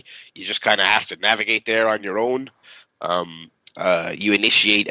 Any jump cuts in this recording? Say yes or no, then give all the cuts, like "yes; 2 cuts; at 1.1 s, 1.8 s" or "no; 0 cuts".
no; 0 cuts